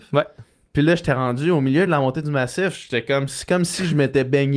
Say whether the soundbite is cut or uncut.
uncut